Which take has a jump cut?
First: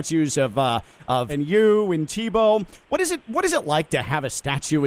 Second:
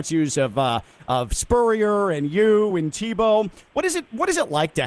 first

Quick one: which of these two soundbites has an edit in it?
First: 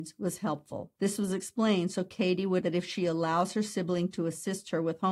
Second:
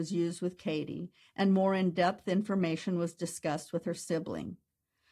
first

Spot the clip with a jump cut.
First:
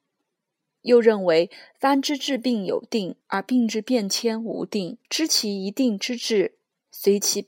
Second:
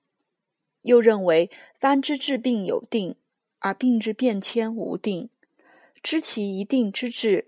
first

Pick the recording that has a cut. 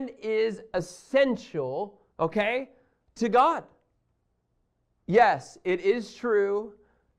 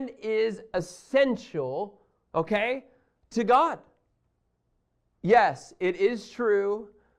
first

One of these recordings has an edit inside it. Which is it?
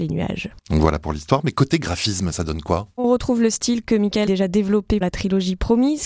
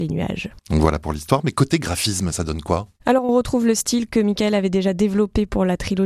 first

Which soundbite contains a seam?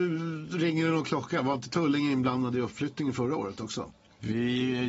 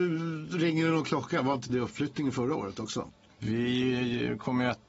second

